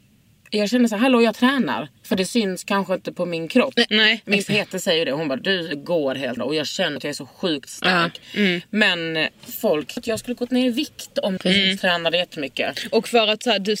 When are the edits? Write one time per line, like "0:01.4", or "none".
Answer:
0:02.0
0:06.4
0:07.0
0:10.0
0:11.4